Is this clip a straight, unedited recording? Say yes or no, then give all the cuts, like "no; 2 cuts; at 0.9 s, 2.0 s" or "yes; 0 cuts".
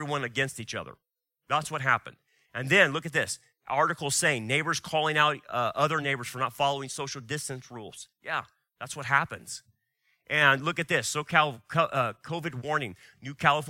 yes; 0 cuts